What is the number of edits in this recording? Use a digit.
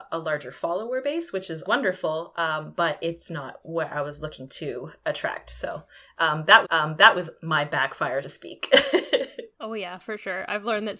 4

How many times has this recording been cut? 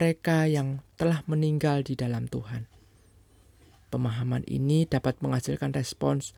0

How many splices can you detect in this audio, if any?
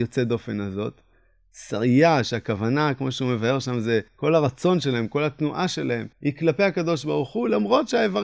2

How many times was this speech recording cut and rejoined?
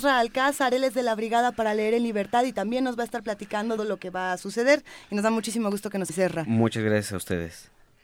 2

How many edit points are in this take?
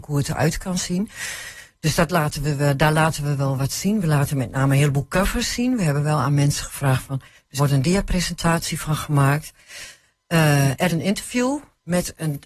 2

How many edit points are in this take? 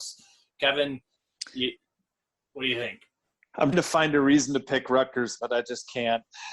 2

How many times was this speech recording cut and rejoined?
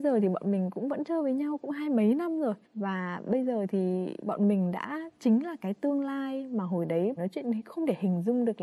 2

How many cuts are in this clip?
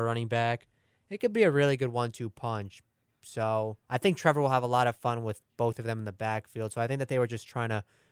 1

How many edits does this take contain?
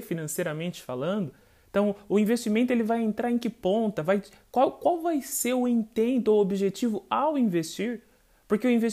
0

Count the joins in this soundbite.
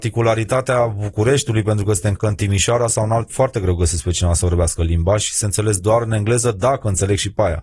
2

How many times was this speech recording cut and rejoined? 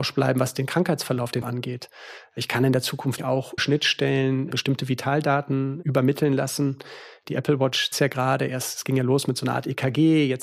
4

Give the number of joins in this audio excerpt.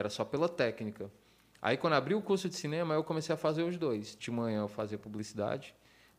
0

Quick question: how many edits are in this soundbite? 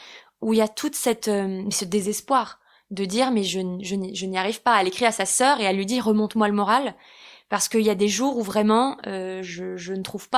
0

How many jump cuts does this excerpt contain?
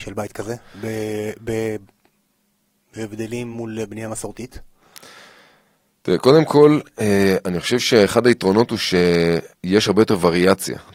0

